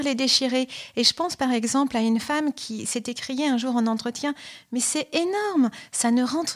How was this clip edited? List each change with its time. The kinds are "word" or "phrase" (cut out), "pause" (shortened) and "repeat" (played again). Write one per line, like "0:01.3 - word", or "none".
none